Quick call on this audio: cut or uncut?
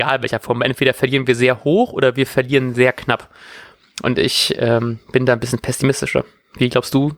uncut